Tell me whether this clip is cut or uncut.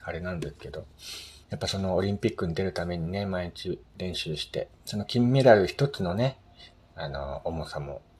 cut